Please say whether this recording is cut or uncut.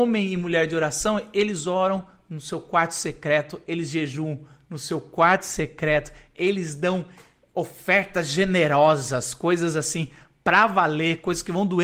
uncut